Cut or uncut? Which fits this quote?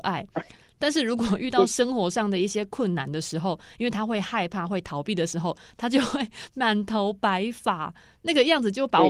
uncut